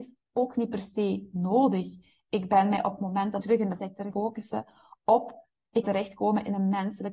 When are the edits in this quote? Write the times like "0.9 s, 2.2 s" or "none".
3.4 s, 3.8 s, 4.1 s, 5.8 s